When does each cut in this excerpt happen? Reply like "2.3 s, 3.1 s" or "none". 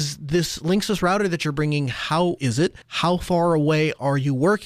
2.4 s, 2.8 s

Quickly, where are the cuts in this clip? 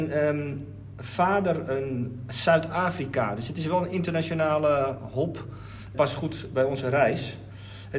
5.9 s

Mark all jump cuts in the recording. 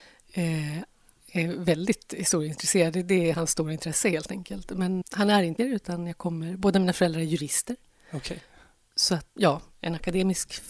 5.0 s, 5.6 s, 9.4 s

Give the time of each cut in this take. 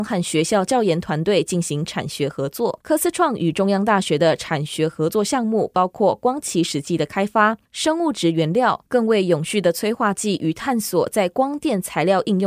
2.8 s, 7.7 s

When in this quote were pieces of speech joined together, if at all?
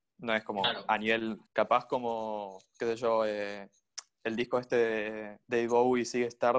1.5 s, 5.4 s

